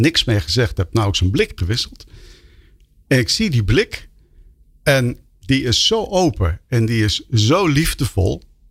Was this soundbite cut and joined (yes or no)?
no